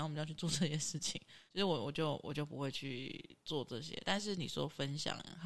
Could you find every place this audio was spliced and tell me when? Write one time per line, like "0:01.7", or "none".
0:01.5

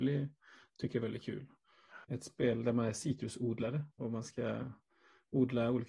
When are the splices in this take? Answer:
0:02.0
0:03.9

